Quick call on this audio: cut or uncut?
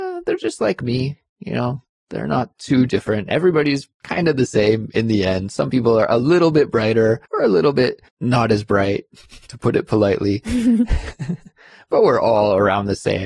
cut